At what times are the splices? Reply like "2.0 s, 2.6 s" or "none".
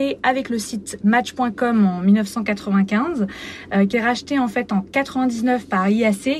3.9 s